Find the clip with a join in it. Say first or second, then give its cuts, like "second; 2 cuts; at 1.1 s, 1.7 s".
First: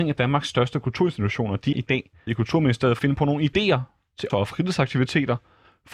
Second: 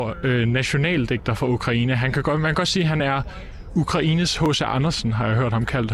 first; 4 cuts; at 1.7 s, 2.3 s, 3.0 s, 4.3 s